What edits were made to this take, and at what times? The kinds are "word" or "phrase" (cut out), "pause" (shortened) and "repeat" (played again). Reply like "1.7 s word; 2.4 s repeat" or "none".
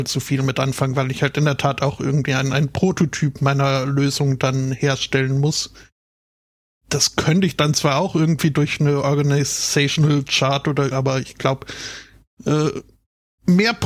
10.9 s phrase